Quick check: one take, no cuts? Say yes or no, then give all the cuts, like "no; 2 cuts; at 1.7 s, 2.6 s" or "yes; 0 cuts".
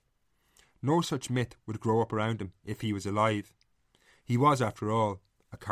yes; 0 cuts